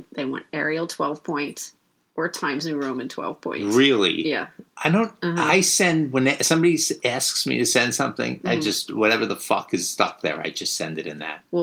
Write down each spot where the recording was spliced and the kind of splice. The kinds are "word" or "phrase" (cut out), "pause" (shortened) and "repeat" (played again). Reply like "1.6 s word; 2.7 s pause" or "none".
none